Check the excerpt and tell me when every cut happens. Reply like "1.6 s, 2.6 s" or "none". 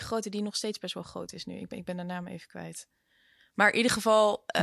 none